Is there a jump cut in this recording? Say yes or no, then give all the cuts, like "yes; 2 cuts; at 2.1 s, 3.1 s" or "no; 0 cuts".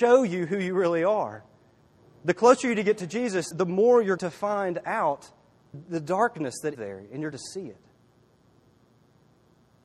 yes; 5 cuts; at 3.5 s, 4.2 s, 5.7 s, 6.7 s, 7.3 s